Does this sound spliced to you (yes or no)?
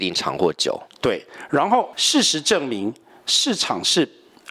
no